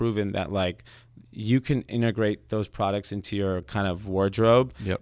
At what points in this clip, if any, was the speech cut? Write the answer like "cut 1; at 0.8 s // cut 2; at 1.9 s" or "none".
none

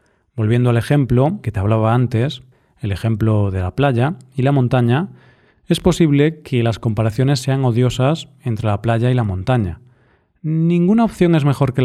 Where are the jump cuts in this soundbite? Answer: cut 1; at 1.4 s

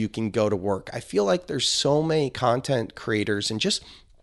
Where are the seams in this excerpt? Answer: none

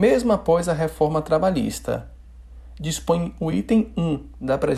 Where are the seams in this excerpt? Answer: none

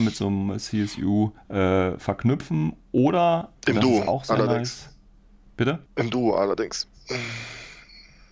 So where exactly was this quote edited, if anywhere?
cut 1; at 1.4 s // cut 2; at 3.5 s // cut 3; at 5.9 s

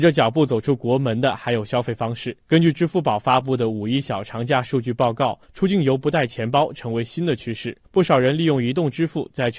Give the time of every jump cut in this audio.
cut 1; at 2.4 s // cut 2; at 5.4 s // cut 3; at 7.8 s

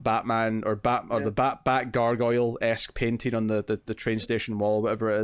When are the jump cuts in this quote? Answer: none

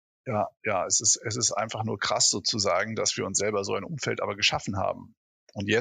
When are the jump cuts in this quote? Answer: none

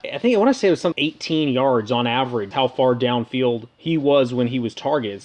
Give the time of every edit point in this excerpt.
cut 1; at 0.9 s // cut 2; at 2.5 s

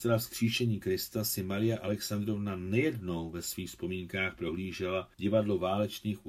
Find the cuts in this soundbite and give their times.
cut 1; at 5.1 s

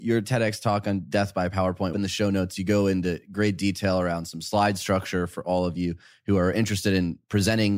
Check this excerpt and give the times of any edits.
cut 1; at 1.9 s

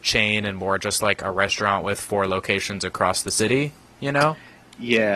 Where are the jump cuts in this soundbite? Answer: none

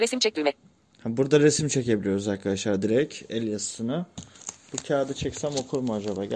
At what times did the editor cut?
none

